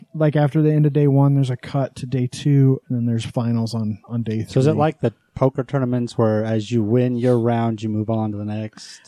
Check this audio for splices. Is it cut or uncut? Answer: uncut